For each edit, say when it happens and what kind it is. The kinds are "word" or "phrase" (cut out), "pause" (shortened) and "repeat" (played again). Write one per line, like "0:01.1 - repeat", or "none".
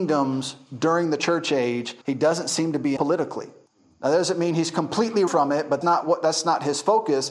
0:02.0 - pause
0:03.0 - word
0:03.7 - pause
0:05.3 - word
0:05.8 - word